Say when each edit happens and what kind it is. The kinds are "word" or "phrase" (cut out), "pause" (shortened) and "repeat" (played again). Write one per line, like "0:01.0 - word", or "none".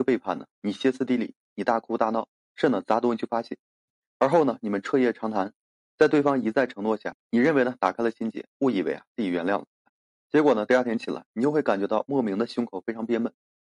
0:07.2 - pause